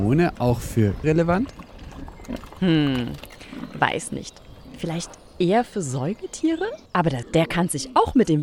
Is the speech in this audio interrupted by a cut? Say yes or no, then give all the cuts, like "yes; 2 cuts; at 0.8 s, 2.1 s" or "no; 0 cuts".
yes; 3 cuts; at 1.0 s, 6.9 s, 7.2 s